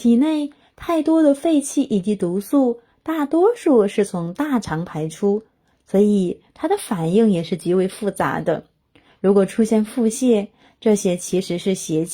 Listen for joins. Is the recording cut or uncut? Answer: uncut